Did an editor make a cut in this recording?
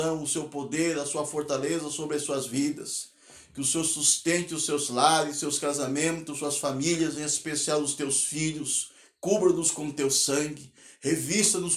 no; 0 cuts

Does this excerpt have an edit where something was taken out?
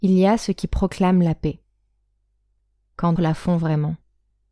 yes; 1 cut; at 3.2 s

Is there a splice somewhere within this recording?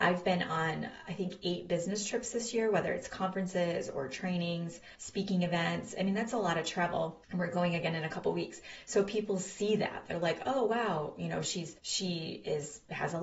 yes; 3 cuts; at 5.0 s, 7.2 s, 11.8 s

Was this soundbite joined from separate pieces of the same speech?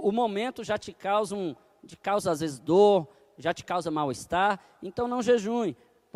no; 0 cuts

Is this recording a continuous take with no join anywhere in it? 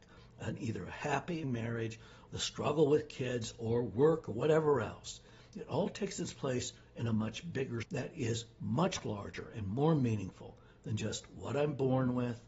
no; 3 cuts; at 1.4 s, 2.3 s, 7.8 s

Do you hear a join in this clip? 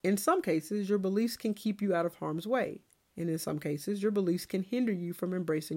no; 0 cuts

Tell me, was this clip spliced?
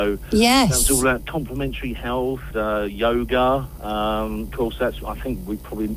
yes; 1 cut; at 2.5 s

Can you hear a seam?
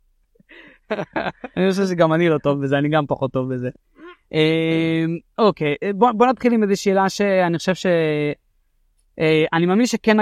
no; 0 cuts

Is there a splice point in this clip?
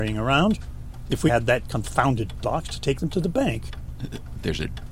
yes; 2 cuts; at 1.3 s, 2.4 s

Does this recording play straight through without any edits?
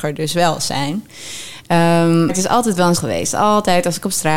no; 2 cuts; at 2.3 s, 2.9 s

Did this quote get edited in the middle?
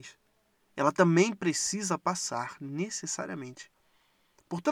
no; 0 cuts

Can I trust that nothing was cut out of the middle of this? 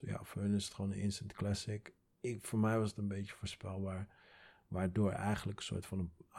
yes; 0 cuts

